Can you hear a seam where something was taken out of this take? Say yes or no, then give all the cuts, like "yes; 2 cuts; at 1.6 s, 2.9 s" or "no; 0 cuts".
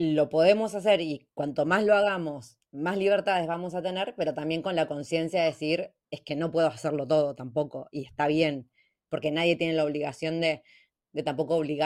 no; 0 cuts